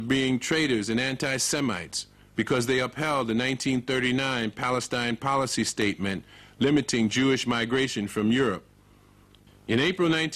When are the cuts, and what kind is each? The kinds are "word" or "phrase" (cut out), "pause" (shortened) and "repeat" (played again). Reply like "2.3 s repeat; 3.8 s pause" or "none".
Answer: none